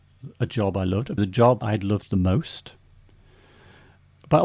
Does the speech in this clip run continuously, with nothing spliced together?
no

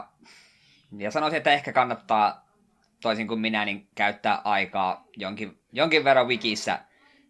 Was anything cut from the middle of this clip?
no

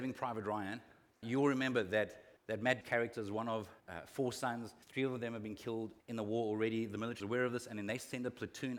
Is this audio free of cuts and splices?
no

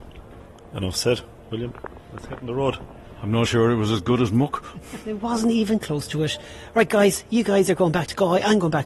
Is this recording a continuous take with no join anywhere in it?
no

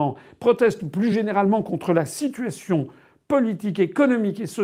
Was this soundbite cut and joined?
no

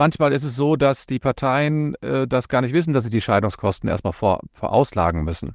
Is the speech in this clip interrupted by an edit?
no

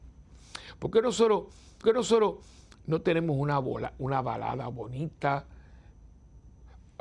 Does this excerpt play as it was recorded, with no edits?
no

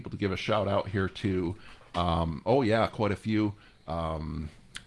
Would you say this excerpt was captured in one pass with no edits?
yes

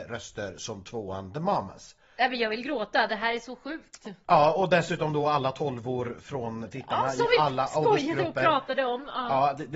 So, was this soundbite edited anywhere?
no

